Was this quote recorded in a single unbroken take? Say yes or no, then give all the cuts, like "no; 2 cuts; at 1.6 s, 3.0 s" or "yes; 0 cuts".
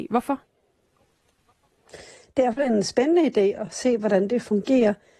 yes; 0 cuts